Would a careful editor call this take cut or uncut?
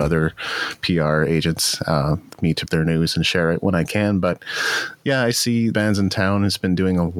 cut